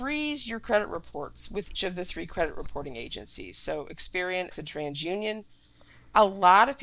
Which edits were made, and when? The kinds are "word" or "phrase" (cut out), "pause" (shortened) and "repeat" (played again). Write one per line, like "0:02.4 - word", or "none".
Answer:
0:01.7 - word
0:04.5 - word